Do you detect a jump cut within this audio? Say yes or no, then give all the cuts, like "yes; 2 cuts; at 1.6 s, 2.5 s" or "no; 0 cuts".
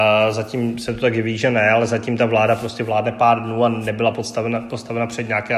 no; 0 cuts